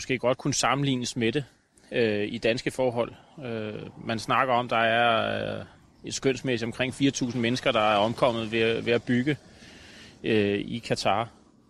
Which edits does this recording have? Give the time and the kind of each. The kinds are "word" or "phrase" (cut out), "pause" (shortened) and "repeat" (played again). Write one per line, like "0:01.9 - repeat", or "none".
none